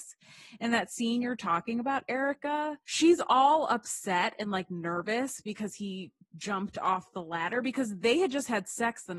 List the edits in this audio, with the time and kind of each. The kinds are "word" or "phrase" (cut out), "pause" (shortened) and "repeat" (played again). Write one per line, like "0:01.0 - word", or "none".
0:02.8 - pause